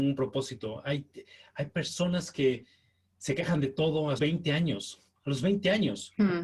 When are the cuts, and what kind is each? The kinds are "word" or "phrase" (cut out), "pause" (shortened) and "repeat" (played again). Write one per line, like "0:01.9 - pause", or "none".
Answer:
0:04.2 - word